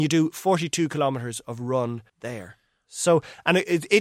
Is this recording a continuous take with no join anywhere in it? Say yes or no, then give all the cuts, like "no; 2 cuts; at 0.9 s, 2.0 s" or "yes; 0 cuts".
no; 1 cut; at 2.1 s